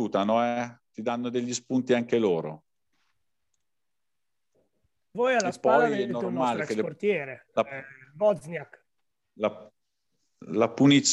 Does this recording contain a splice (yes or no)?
no